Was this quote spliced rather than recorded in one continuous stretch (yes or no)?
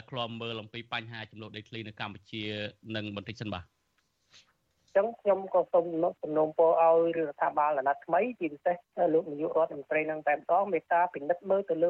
no